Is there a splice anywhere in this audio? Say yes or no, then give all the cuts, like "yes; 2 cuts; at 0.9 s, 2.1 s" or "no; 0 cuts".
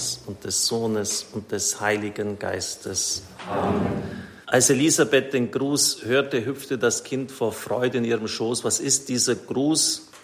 yes; 1 cut; at 4.4 s